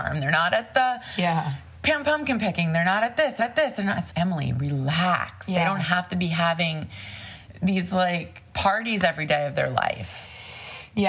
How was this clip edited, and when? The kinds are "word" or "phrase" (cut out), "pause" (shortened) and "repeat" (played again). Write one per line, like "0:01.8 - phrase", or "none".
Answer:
0:03.4 - repeat
0:04.1 - word